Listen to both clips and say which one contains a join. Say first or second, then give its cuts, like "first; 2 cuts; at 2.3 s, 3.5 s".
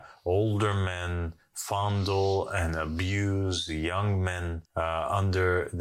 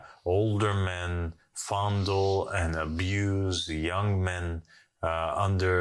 first; 1 cut; at 4.7 s